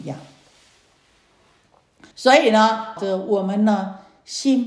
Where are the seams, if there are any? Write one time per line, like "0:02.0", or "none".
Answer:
0:02.1
0:03.0